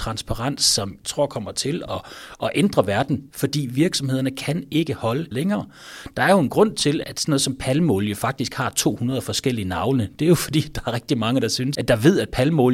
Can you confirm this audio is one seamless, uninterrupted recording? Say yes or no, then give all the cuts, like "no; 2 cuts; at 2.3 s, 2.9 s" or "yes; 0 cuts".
no; 5 cuts; at 1.0 s, 3.3 s, 5.3 s, 7.0 s, 11.7 s